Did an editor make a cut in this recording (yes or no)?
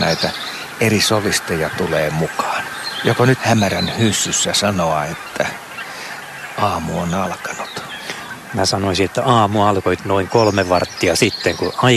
yes